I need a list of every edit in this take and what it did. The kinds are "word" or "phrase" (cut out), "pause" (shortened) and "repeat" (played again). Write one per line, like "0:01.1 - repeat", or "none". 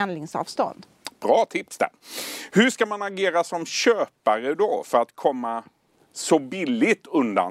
none